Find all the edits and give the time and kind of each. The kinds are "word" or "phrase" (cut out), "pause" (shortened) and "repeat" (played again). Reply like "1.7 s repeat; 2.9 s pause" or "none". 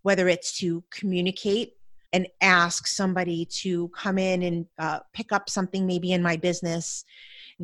2.0 s pause; 4.7 s pause